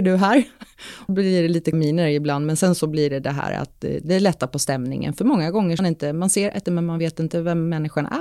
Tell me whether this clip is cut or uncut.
cut